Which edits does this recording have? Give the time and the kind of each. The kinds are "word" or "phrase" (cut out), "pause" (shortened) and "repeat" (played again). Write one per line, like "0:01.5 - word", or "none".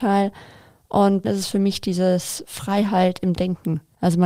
0:01.2 - word